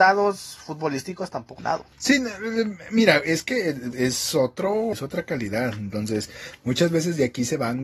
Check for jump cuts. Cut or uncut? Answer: cut